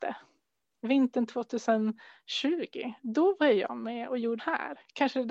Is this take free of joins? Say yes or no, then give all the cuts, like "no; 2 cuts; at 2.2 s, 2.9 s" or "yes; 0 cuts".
no; 1 cut; at 4.4 s